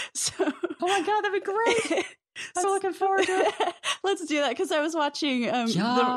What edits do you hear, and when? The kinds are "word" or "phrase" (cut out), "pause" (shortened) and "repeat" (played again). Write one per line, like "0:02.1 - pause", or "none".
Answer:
0:02.6 - word